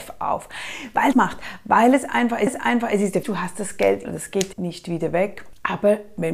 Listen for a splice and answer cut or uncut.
cut